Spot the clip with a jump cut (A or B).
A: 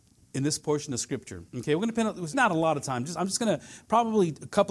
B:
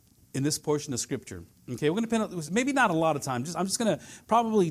A